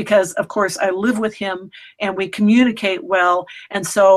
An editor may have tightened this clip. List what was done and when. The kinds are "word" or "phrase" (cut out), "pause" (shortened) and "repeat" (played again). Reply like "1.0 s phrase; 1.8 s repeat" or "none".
none